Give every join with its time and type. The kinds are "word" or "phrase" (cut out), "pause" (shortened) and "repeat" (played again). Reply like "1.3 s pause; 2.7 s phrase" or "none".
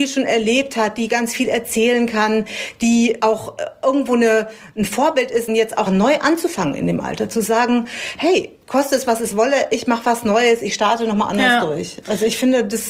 3.2 s word; 5.5 s word; 5.9 s word